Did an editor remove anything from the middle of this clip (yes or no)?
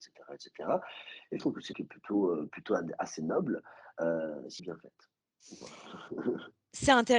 yes